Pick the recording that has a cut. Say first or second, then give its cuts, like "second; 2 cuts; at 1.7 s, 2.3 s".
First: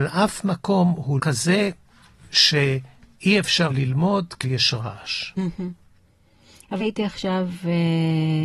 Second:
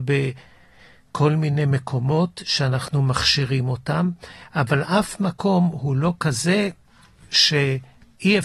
first; 4 cuts; at 1.2 s, 3.7 s, 4.4 s, 6.8 s